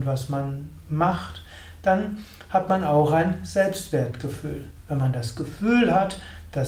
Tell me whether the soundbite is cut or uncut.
uncut